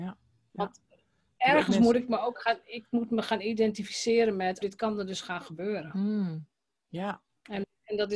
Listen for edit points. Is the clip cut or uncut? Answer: cut